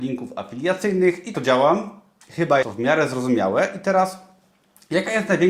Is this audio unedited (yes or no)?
no